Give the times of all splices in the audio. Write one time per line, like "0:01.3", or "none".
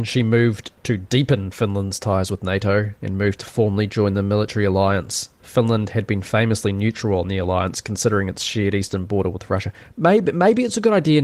none